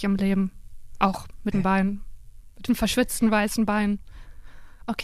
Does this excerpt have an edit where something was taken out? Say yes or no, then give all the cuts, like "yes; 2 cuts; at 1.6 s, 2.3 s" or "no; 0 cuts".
yes; 2 cuts; at 1.5 s, 2.7 s